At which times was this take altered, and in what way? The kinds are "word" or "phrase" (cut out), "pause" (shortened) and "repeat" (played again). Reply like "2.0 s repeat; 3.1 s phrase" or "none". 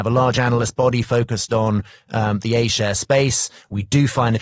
none

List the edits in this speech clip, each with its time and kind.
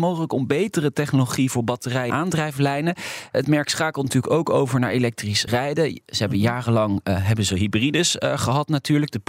2.1 s word; 5.5 s word

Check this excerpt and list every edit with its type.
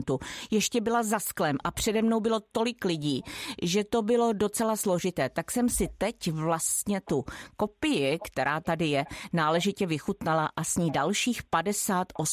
none

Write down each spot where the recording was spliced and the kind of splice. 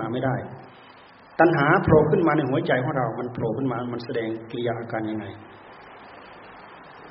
none

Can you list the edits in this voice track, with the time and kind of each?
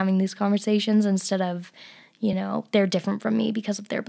none

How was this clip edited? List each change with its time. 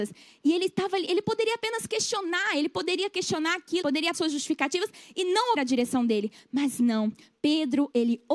3.8 s word; 4.1 s word; 5.6 s word

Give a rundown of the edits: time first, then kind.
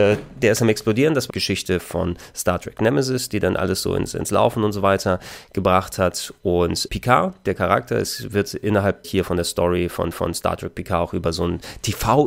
1.3 s phrase; 6.9 s word; 9.0 s word; 10.1 s repeat

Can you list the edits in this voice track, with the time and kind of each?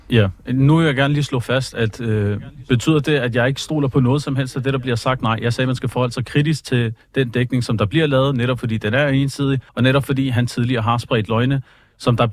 9.7 s pause

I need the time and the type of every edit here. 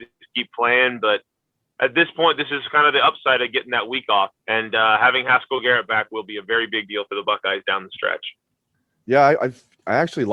4.4 s pause

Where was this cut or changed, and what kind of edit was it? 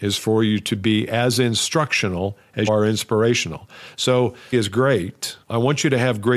2.7 s word; 4.5 s word; 5.4 s pause

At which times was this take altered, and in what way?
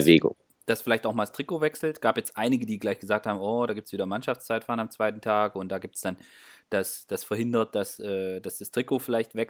none

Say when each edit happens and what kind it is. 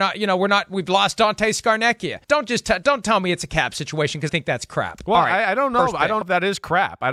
2.2 s pause; 4.3 s word; 6.2 s word

